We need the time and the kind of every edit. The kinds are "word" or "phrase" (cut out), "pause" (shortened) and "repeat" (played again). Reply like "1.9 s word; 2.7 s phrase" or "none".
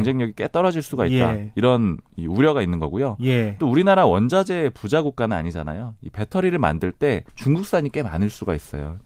7.3 s pause